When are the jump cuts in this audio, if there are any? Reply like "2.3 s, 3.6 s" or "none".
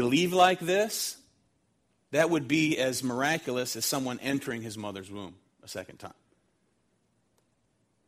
none

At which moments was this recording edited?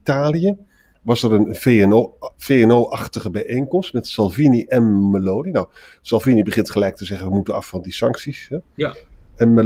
none

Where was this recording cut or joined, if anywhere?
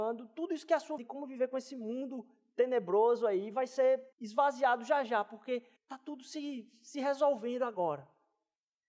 1.0 s, 4.1 s, 5.8 s

